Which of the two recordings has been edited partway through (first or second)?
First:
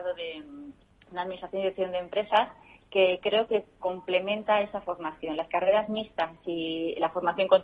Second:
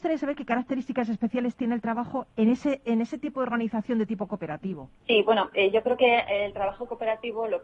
second